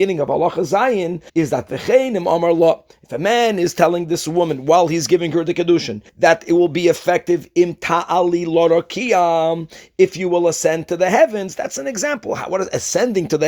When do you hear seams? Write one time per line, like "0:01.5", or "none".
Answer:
0:01.3
0:06.1